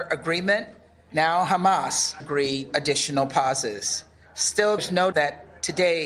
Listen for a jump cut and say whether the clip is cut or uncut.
cut